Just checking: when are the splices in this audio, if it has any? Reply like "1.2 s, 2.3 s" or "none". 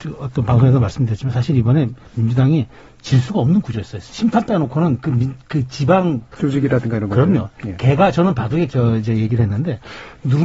2.8 s, 8.7 s